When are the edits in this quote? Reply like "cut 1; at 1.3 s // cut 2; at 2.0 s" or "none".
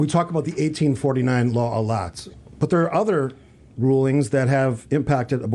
none

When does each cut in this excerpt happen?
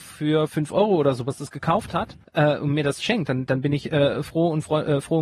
cut 1; at 2.2 s

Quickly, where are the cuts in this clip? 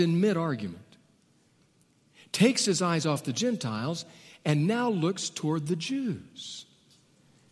none

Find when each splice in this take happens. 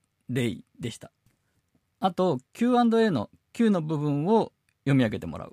none

